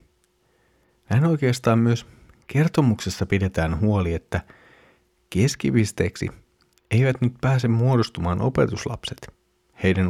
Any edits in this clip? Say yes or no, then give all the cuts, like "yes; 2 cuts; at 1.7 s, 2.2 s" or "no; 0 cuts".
no; 0 cuts